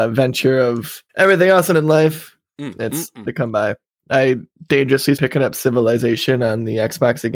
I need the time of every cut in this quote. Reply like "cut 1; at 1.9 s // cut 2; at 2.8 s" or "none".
cut 1; at 1.1 s // cut 2; at 1.7 s // cut 3; at 3.3 s // cut 4; at 5.2 s